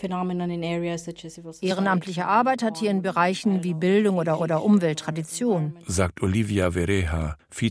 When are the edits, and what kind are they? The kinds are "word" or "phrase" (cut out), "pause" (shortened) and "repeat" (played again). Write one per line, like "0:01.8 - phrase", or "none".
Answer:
0:04.4 - repeat